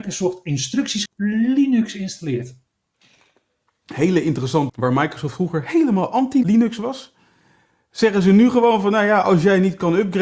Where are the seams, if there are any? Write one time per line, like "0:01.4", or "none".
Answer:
0:01.1
0:04.7